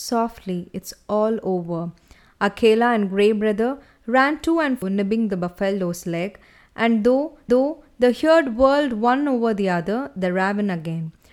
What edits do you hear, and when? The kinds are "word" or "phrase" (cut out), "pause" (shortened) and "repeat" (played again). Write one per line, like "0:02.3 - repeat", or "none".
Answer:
0:04.8 - word
0:07.5 - repeat

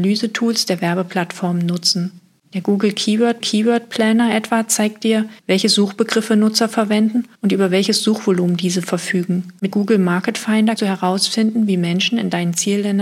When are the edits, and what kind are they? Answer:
0:03.4 - repeat
0:05.4 - pause
0:07.3 - pause
0:09.7 - word
0:10.8 - word

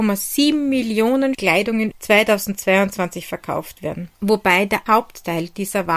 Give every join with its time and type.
0:01.3 - word
0:01.9 - word
0:04.1 - pause
0:04.9 - word

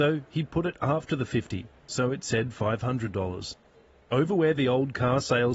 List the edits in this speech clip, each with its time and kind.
none

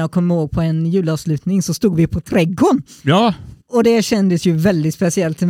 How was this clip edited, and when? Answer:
0:03.6 - pause

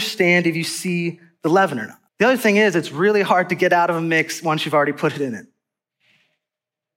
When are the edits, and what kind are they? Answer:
0:02.1 - pause

